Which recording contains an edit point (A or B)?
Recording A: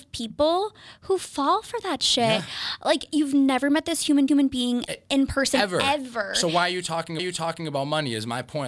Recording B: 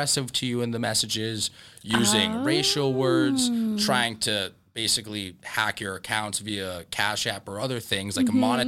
A